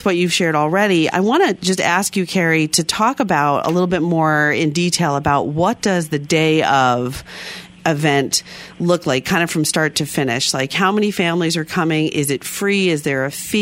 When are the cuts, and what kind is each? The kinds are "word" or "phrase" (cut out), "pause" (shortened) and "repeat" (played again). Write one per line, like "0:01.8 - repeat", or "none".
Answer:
none